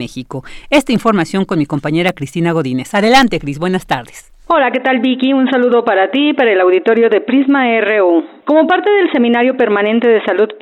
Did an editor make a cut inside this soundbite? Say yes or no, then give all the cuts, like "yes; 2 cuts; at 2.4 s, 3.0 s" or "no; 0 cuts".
no; 0 cuts